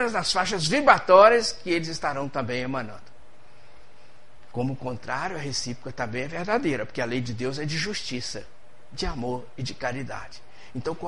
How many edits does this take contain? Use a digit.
0